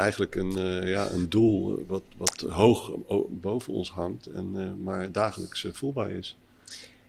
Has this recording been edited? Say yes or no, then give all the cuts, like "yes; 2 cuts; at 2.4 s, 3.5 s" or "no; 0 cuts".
no; 0 cuts